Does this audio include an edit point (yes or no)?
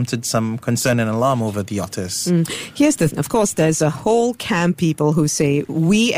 yes